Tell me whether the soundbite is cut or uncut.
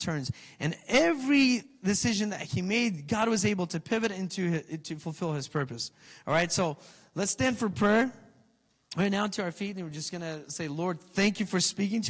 uncut